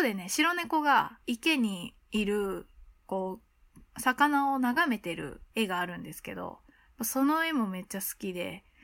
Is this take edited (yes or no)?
yes